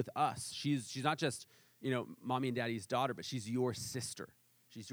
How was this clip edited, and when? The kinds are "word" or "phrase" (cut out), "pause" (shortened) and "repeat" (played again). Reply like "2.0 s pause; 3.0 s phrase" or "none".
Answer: none